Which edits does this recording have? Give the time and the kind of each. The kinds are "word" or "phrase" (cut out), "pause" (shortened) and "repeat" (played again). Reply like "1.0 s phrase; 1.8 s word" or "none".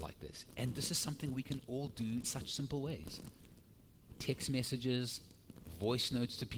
2.2 s word